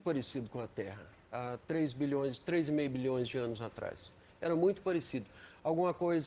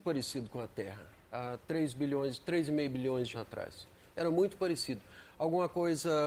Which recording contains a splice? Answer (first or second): second